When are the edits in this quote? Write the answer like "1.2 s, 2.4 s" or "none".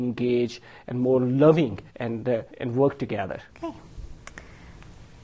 1.9 s, 2.5 s, 3.5 s